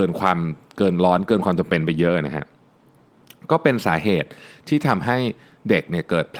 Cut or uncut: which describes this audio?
uncut